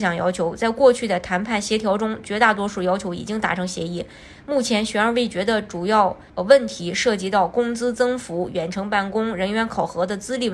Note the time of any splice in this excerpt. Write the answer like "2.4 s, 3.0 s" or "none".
6.3 s